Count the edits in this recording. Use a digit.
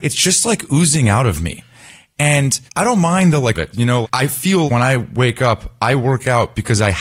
4